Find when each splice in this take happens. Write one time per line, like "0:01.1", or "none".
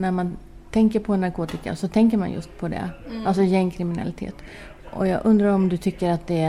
0:04.8